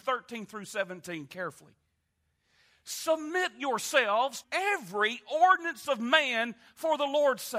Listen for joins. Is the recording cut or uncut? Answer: cut